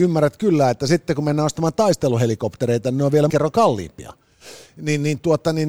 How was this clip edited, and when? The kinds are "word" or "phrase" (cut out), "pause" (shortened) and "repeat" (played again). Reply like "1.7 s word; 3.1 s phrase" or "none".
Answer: 3.3 s word